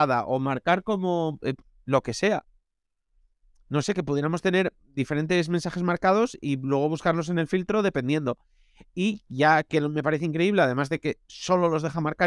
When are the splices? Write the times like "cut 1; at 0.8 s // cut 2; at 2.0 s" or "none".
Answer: none